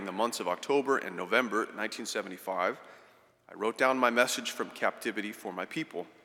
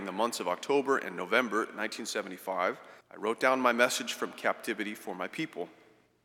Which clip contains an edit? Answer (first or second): second